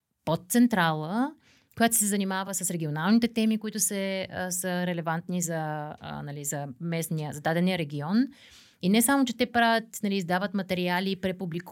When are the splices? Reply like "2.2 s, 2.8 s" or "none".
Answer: none